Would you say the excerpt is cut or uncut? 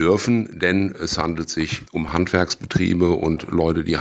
uncut